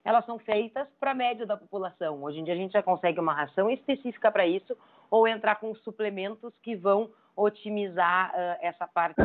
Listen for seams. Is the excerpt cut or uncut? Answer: uncut